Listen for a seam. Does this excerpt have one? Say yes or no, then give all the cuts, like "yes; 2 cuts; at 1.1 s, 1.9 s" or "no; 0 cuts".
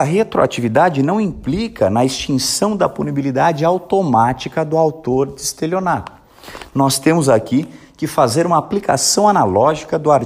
no; 0 cuts